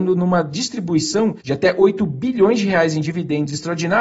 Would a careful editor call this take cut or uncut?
cut